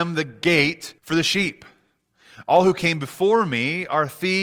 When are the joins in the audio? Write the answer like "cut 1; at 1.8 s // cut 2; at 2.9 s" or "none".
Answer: cut 1; at 1.0 s